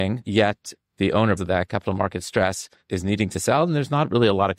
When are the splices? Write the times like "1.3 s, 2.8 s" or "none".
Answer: 1.4 s

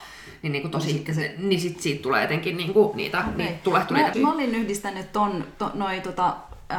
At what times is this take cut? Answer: 4.1 s

